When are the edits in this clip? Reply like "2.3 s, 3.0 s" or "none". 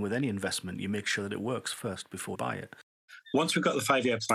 2.3 s